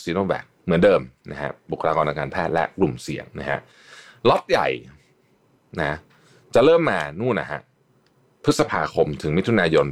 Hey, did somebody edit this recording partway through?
yes; 1 cut; at 3.3 s

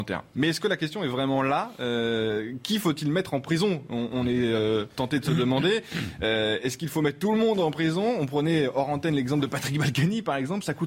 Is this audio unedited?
yes; 0 cuts

